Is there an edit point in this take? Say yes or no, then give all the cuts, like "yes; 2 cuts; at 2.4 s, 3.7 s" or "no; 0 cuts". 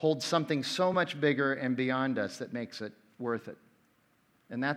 no; 0 cuts